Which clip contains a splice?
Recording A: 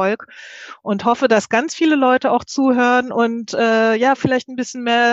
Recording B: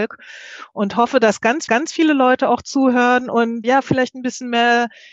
B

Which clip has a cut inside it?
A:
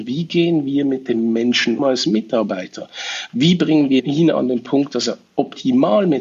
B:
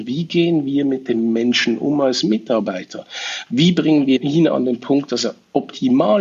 A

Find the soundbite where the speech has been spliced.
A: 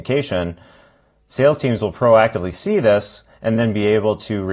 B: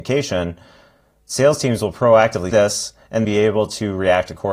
B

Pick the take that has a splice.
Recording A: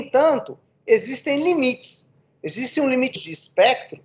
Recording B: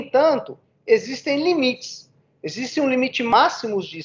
A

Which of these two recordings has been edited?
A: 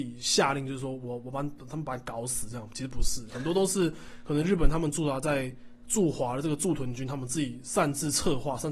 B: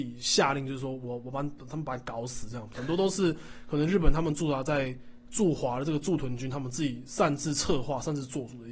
B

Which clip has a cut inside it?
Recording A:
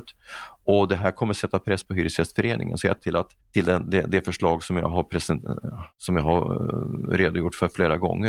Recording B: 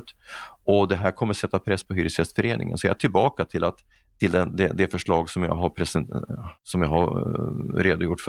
A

